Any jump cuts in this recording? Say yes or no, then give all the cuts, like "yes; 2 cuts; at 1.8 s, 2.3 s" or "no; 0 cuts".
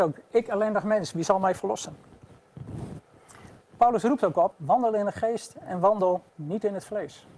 yes; 3 cuts; at 3.6 s, 4.5 s, 6.3 s